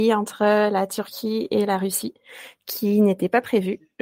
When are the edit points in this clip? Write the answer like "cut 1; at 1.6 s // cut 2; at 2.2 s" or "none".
none